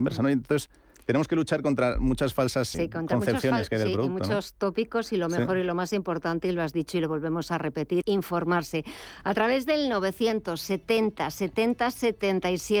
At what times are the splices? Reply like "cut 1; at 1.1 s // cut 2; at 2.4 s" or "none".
cut 1; at 2.7 s // cut 2; at 8.0 s